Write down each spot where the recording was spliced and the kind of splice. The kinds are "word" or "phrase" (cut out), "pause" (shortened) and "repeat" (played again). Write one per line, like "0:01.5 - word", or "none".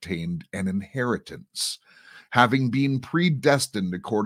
none